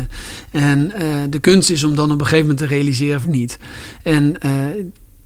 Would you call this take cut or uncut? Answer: cut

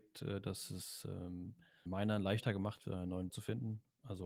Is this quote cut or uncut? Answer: cut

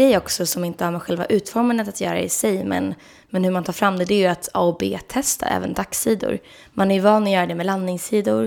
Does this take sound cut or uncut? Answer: uncut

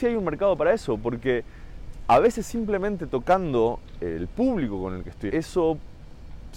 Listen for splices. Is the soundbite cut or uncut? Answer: cut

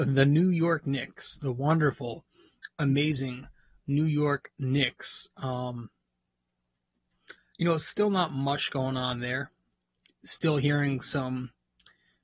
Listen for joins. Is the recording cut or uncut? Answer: uncut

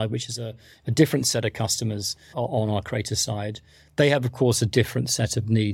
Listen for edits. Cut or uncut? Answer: uncut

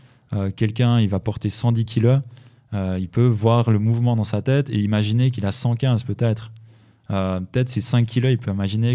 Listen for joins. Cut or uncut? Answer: uncut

